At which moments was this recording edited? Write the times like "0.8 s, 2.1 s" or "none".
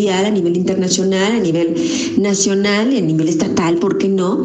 none